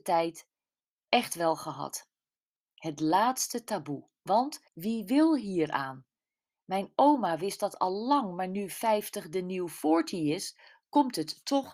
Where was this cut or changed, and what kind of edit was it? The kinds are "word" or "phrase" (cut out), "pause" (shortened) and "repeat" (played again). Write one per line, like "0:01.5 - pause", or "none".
0:04.7 - pause